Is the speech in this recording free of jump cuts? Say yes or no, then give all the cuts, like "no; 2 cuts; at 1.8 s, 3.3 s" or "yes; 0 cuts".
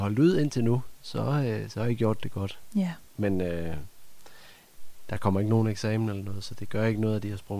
yes; 0 cuts